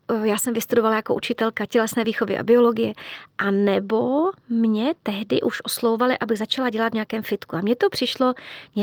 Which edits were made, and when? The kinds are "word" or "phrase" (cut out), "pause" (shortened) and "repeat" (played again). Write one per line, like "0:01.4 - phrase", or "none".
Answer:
none